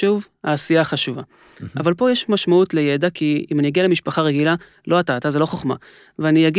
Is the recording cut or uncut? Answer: uncut